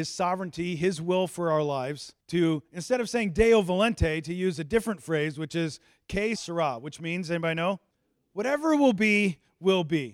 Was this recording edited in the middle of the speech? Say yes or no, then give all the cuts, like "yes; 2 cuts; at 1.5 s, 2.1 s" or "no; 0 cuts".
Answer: yes; 3 cuts; at 2.2 s, 6.4 s, 7.9 s